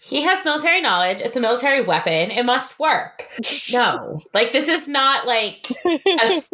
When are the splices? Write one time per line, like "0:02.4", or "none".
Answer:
none